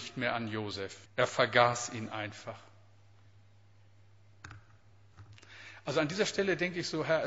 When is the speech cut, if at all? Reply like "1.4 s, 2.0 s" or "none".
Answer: 1.1 s

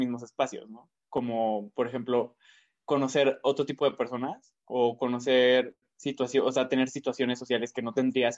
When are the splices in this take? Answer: none

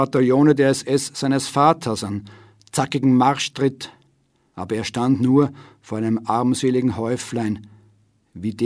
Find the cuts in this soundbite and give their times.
none

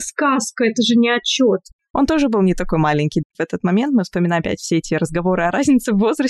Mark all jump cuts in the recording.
none

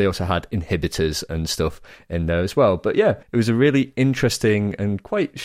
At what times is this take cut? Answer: 3.2 s

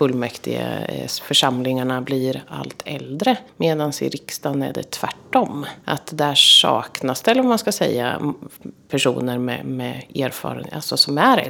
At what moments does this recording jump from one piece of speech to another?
3.5 s, 5.8 s

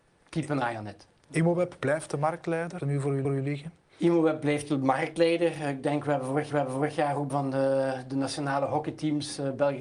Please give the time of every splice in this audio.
2.8 s, 3.2 s, 6.5 s, 7.3 s

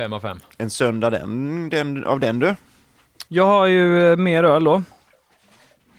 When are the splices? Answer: 3.3 s

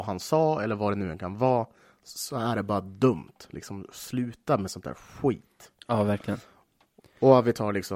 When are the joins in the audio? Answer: none

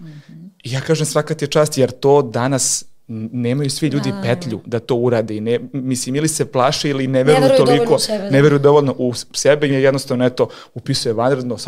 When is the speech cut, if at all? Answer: 9.7 s

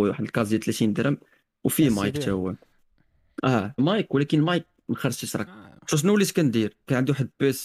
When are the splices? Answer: 3.8 s, 5.5 s

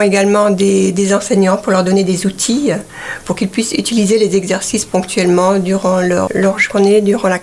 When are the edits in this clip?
6.3 s

